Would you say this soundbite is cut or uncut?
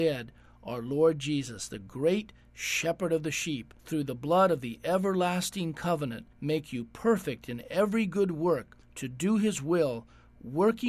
cut